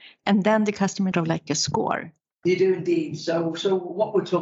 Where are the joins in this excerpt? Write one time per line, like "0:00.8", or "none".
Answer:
0:01.1
0:02.3